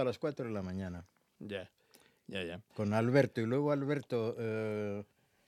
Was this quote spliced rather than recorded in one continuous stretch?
no; 0 cuts

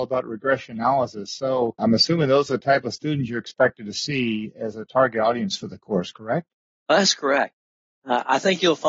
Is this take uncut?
yes; 0 cuts

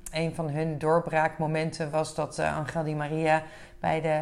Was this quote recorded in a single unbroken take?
yes; 0 cuts

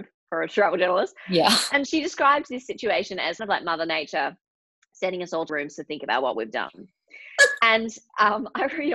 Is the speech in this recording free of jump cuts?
no; 3 cuts; at 1.9 s, 3.4 s, 5.5 s

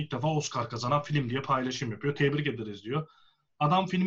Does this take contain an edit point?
no; 0 cuts

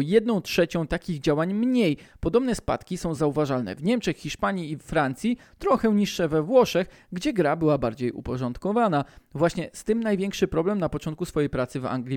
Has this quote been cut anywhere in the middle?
no; 0 cuts

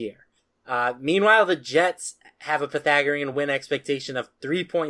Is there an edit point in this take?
no; 0 cuts

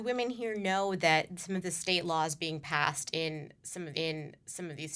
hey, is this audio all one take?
no; 1 cut; at 3.9 s

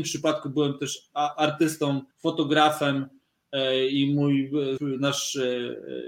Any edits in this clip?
yes; 2 cuts; at 2.1 s, 4.8 s

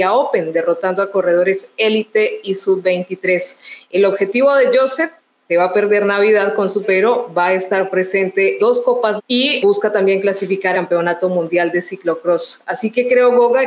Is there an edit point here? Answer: yes; 6 cuts; at 5.5 s, 6.8 s, 8.6 s, 9.2 s, 9.6 s, 10.7 s

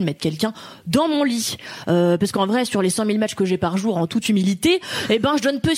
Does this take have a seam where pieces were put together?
no; 0 cuts

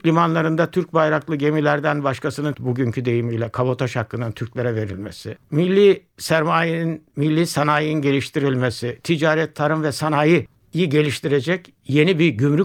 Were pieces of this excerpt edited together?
yes; 3 cuts; at 2.5 s, 5.4 s, 7.1 s

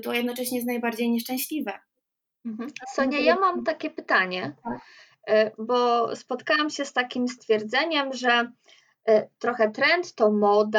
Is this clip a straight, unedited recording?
yes; 0 cuts

